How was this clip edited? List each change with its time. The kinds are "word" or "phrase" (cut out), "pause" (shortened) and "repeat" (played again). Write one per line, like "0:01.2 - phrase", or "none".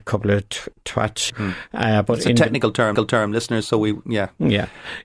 0:01.3 - phrase
0:03.0 - repeat